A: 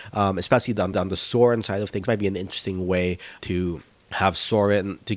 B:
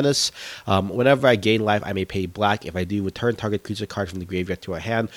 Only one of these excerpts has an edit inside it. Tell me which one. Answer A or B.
A